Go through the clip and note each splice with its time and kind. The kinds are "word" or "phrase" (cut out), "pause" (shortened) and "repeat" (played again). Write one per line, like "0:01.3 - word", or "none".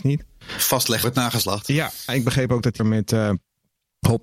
0:01.0 - word
0:02.1 - word
0:02.8 - word